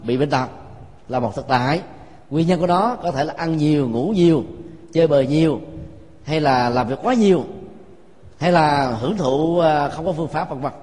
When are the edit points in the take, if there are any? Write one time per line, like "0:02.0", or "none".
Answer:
none